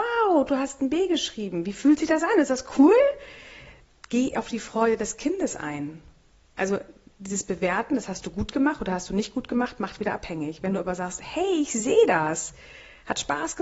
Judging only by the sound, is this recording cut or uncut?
uncut